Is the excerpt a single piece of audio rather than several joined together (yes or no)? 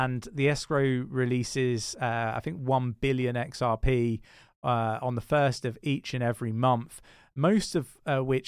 yes